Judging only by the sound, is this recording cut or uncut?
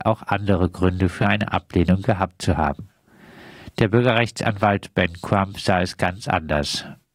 uncut